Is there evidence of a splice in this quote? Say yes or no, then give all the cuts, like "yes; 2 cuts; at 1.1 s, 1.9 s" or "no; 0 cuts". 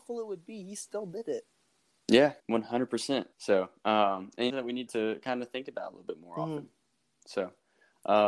yes; 4 cuts; at 2.4 s, 3.3 s, 4.5 s, 4.9 s